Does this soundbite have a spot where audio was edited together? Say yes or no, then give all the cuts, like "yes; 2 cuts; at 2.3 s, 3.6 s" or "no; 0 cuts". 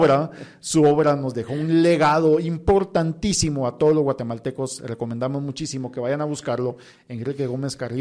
no; 0 cuts